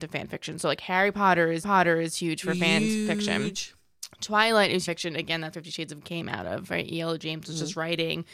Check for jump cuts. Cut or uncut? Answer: cut